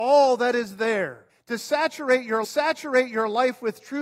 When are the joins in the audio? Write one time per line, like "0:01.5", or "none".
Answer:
0:01.3
0:02.4